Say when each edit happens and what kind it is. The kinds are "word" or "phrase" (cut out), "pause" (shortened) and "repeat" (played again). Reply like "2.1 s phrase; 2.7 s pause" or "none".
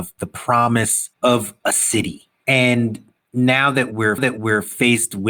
1.1 s pause; 4.2 s repeat